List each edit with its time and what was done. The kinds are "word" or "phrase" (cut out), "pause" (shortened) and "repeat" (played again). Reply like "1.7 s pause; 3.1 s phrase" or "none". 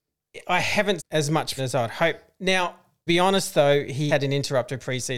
1.0 s word; 1.6 s word; 3.1 s word; 4.1 s word